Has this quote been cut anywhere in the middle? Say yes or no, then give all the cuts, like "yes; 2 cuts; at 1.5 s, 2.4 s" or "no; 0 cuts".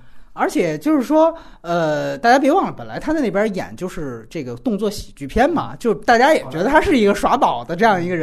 no; 0 cuts